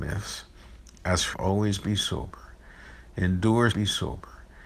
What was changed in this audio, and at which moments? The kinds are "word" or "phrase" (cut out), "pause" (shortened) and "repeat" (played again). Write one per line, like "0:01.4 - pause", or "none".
0:01.3 - word
0:03.7 - repeat